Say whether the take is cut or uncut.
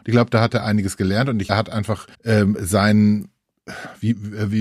cut